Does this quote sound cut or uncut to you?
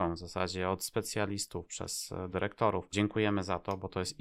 cut